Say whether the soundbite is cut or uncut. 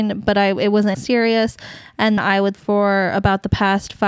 cut